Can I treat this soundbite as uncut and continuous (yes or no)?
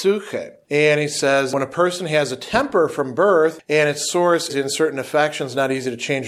no